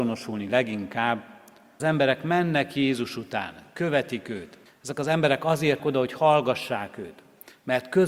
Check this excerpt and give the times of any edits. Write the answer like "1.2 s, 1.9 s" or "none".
1.8 s, 4.7 s, 5.8 s